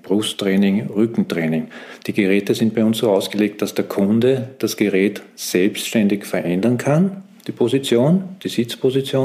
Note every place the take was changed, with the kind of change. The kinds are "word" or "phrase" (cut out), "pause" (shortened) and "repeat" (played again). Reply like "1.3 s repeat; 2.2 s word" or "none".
none